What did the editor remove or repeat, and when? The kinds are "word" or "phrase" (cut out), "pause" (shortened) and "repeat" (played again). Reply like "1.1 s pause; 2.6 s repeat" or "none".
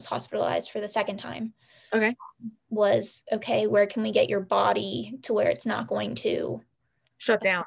2.6 s pause